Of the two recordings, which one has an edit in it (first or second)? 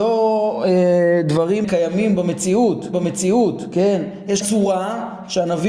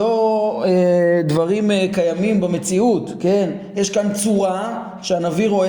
first